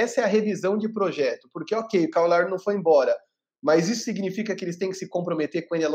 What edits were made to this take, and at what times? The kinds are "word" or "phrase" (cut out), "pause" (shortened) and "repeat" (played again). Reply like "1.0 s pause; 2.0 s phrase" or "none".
none